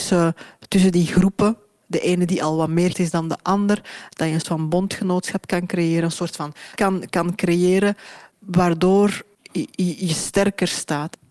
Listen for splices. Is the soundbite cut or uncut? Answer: cut